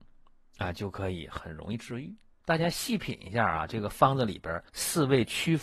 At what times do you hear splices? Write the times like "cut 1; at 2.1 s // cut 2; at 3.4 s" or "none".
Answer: cut 1; at 2.3 s // cut 2; at 4.7 s